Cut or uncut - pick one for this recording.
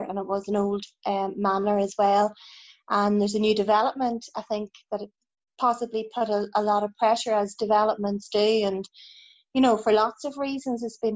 uncut